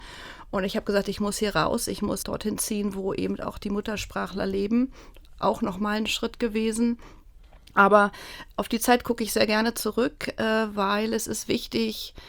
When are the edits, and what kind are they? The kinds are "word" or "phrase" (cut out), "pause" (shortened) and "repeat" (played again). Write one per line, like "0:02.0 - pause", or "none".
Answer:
0:02.2 - word